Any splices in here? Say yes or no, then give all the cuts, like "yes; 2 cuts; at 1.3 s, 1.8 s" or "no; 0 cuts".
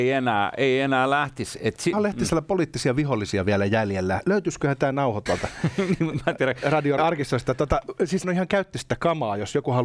yes; 4 cuts; at 1.9 s, 5.3 s, 7.0 s, 8.2 s